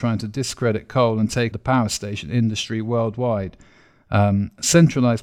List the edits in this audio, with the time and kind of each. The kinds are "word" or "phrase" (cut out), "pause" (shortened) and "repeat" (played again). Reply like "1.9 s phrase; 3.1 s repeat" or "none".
1.5 s word

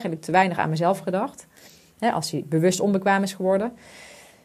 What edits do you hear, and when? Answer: none

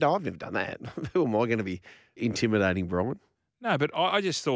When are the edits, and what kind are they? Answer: 2.2 s word

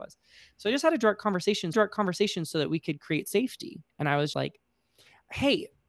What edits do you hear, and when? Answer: 1.7 s repeat; 3.9 s pause; 4.3 s word

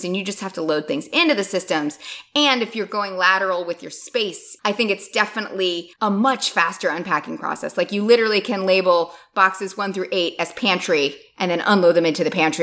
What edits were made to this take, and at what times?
5.9 s pause

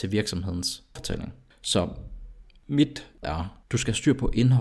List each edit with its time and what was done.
1.0 s word; 1.5 s pause; 3.2 s word; 3.6 s pause

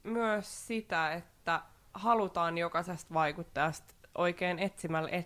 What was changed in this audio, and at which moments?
none

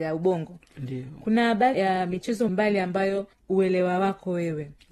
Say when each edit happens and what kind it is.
1.7 s word; 2.5 s word; 3.3 s word

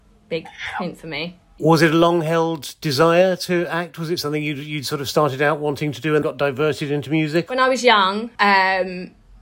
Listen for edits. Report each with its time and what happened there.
6.2 s word; 8.3 s pause

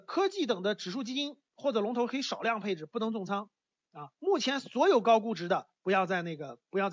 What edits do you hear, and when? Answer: 4.1 s pause; 5.8 s pause

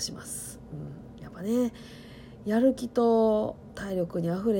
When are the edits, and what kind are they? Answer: none

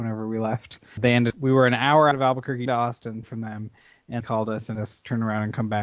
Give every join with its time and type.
1.0 s word; 1.3 s word; 2.1 s word; 2.7 s word; 3.2 s word; 4.2 s word; 4.8 s word

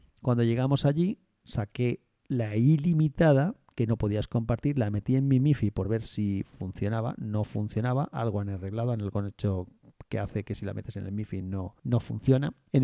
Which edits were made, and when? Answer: none

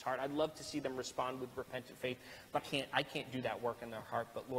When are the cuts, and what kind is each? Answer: 2.6 s word

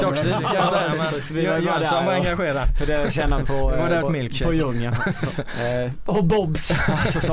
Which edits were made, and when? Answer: 4.0 s word

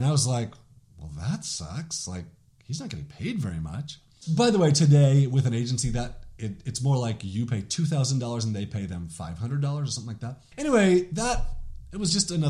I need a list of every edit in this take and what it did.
none

